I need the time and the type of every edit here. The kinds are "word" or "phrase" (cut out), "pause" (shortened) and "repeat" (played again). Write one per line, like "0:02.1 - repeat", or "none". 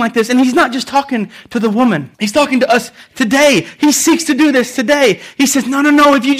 0:02.1 - pause